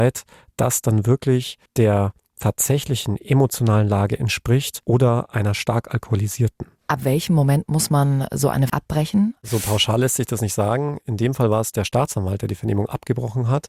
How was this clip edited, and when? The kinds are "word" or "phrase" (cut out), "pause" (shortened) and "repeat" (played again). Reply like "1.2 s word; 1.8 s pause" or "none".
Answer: 1.7 s pause; 4.8 s pause; 8.7 s word